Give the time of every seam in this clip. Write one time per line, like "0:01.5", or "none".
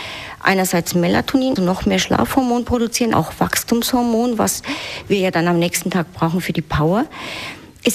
0:01.6
0:03.1